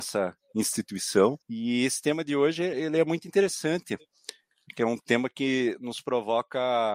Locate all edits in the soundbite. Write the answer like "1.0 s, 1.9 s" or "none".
1.4 s